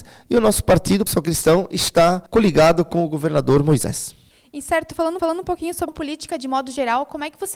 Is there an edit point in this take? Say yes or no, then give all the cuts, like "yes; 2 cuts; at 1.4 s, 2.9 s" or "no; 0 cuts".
yes; 5 cuts; at 1.1 s, 2.3 s, 4.3 s, 5.2 s, 5.9 s